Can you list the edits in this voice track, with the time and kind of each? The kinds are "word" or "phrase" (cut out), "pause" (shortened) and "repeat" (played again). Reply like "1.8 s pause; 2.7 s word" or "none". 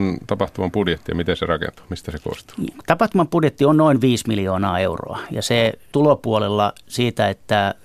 5.9 s phrase